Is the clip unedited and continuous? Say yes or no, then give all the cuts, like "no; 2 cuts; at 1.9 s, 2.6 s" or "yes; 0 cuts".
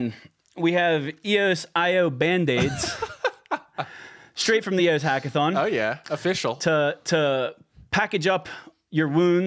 yes; 0 cuts